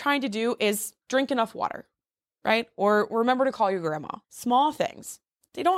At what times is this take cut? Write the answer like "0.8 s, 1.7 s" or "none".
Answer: 1.0 s, 4.2 s

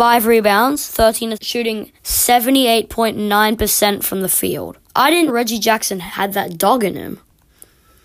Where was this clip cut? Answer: 1.3 s, 2.0 s, 4.9 s, 5.3 s

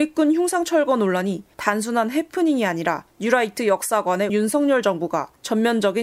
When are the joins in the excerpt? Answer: 4.3 s

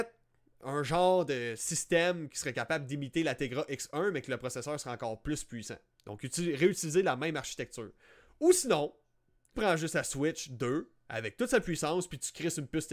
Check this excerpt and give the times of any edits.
9.5 s

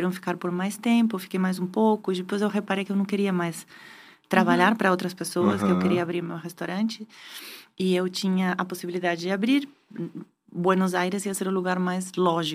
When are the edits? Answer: none

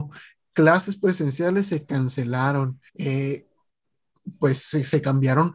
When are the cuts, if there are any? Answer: 2.9 s

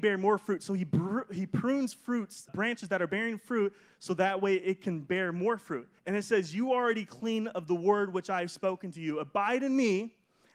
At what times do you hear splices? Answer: 2.5 s, 6.0 s

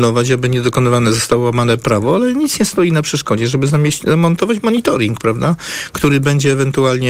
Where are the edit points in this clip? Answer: none

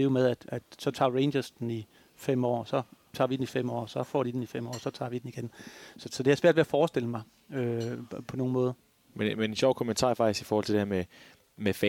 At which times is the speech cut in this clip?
none

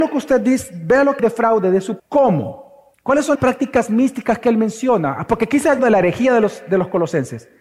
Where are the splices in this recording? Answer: 1.2 s, 2.0 s, 2.9 s, 3.3 s, 5.8 s

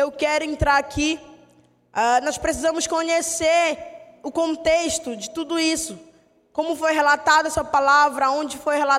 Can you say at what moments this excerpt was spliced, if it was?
none

